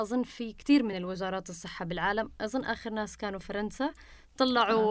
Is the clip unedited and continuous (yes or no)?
yes